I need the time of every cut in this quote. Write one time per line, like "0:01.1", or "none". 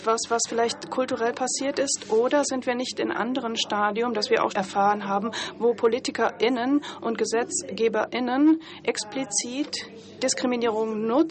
0:03.1
0:04.5